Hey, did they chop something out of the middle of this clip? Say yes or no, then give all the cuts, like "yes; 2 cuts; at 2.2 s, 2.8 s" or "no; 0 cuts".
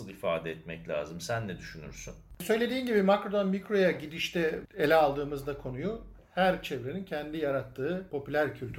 no; 0 cuts